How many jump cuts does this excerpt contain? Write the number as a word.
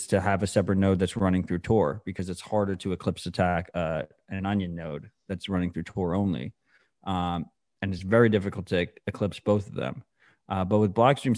zero